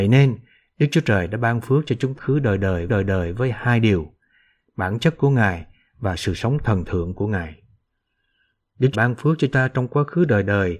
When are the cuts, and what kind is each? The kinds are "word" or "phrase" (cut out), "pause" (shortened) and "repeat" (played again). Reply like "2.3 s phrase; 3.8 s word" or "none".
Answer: 2.2 s phrase; 2.9 s repeat; 8.9 s phrase; 9.5 s word